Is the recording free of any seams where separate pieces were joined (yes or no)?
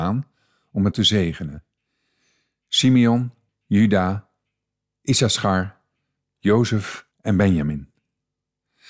no